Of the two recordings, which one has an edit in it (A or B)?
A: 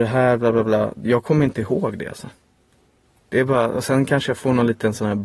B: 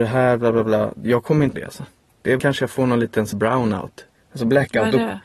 B